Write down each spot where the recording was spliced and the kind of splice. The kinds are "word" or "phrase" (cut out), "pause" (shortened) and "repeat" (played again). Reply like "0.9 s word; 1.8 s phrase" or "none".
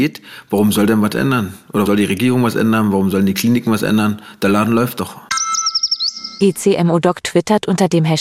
1.8 s word